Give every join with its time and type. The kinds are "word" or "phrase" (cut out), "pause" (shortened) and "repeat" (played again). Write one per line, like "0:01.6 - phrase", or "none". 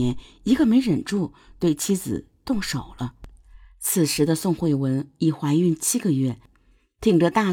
none